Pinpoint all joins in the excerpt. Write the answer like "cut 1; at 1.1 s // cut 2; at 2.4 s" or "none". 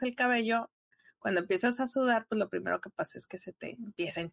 none